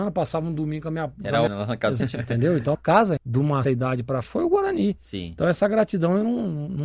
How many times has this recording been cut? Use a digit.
6